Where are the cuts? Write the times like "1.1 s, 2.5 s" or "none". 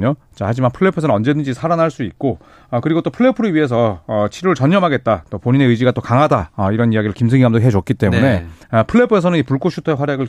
8.6 s